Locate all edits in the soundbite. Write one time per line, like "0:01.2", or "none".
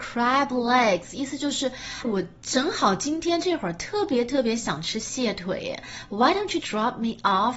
0:02.0
0:06.6